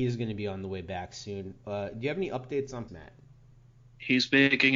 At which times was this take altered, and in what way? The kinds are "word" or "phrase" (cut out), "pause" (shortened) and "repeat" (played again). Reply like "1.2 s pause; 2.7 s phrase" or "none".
2.9 s word